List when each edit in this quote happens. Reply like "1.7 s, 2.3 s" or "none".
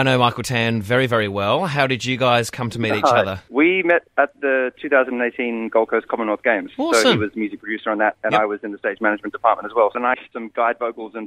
10.1 s